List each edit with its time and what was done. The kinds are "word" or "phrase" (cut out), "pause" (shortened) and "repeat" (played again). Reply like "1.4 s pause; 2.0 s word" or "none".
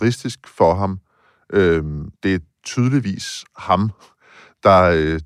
2.2 s pause